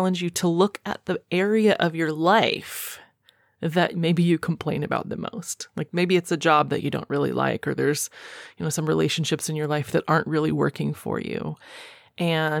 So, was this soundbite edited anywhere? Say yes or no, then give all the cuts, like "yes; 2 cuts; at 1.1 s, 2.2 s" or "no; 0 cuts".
no; 0 cuts